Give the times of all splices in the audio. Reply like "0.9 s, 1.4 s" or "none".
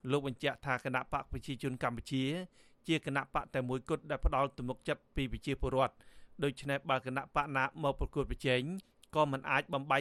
none

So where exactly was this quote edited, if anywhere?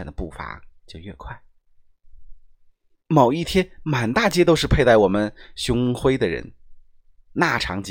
none

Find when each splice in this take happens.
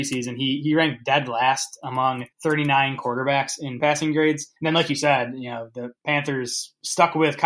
2.3 s, 3.8 s, 4.6 s, 6.0 s

